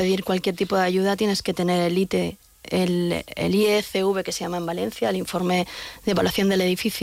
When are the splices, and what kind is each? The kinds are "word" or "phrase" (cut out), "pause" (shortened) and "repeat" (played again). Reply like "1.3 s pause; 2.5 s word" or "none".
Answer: none